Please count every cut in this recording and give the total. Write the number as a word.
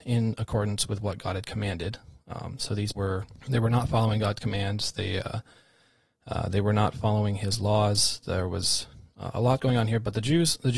two